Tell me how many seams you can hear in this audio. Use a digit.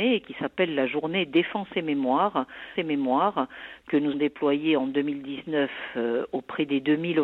2